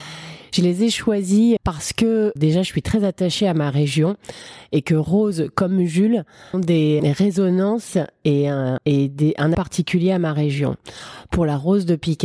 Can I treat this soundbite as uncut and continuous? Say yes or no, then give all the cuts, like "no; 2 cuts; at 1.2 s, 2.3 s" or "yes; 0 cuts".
no; 6 cuts; at 1.6 s, 2.4 s, 6.5 s, 7.0 s, 8.8 s, 9.5 s